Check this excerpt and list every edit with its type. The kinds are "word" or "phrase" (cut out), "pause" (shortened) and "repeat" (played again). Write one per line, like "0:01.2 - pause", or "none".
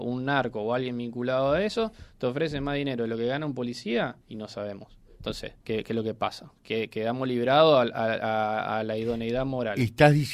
0:04.2 - pause
0:05.6 - pause